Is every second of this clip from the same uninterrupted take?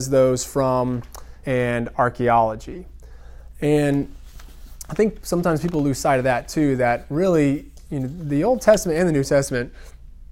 no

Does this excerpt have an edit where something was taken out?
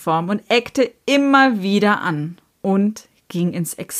no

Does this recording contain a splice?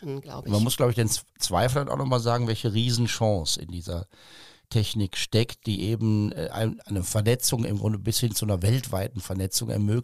no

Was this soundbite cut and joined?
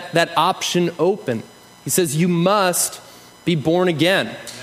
no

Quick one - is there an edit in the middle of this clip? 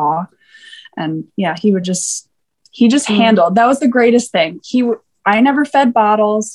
no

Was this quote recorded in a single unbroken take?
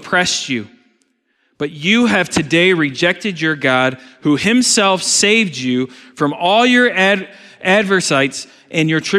yes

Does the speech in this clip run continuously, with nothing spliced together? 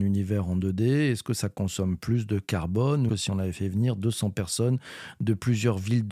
no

